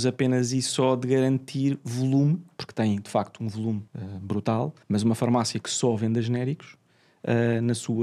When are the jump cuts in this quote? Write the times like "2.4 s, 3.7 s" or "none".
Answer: 3.9 s, 4.8 s